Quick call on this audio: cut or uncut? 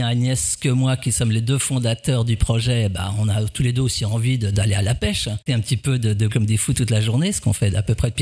cut